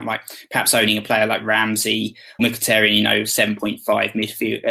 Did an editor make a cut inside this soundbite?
yes; 1 cut; at 2.4 s

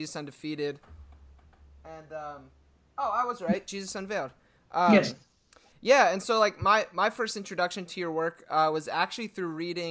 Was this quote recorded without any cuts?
yes; 0 cuts

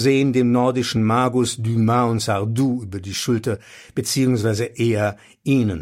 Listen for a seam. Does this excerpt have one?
no; 0 cuts

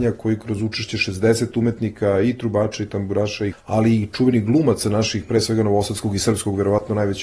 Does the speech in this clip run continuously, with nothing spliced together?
no; 1 cut; at 3.5 s

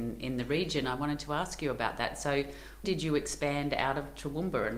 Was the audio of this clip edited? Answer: yes; 1 cut; at 2.8 s

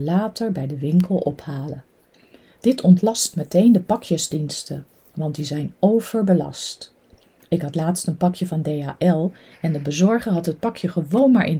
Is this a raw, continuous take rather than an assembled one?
yes; 0 cuts

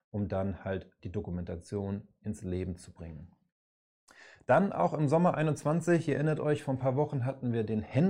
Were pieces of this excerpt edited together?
no; 0 cuts

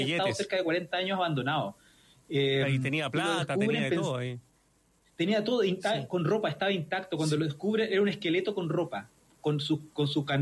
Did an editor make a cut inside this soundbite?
no; 0 cuts

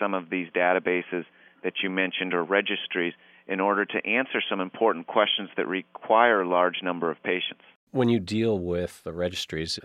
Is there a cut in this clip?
no; 0 cuts

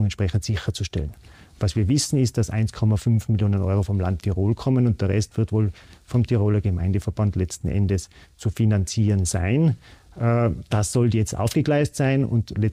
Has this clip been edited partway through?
no; 0 cuts

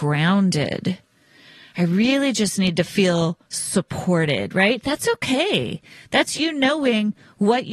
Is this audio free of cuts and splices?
yes; 0 cuts

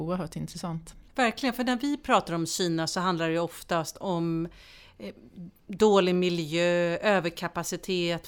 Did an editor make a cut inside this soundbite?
yes; 1 cut; at 1.1 s

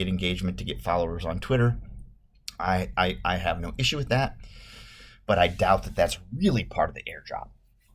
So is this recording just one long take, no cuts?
yes; 0 cuts

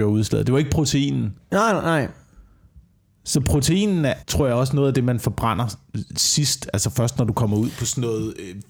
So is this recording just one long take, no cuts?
no; 1 cut; at 4.2 s

